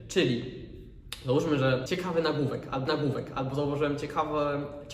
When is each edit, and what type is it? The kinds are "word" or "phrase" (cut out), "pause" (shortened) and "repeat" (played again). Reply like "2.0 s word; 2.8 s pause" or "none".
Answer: 1.9 s word; 2.9 s repeat